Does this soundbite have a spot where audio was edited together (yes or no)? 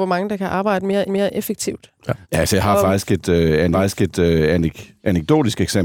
yes